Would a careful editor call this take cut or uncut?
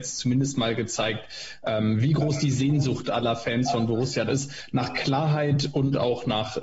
cut